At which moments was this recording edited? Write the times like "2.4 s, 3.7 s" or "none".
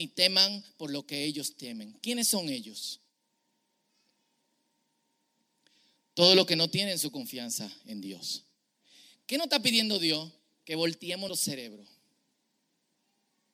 11.3 s